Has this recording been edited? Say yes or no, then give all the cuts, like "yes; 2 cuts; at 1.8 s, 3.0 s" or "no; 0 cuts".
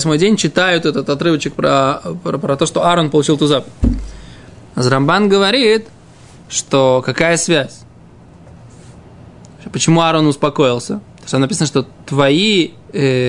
no; 0 cuts